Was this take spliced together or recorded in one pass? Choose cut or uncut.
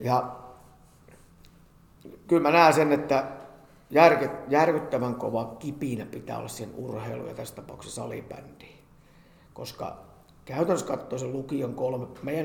uncut